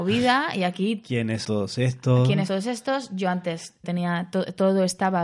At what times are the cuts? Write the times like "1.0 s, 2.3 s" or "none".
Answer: 1.4 s, 2.5 s, 3.8 s